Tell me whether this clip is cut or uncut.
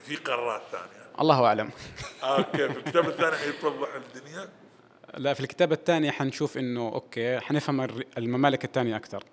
uncut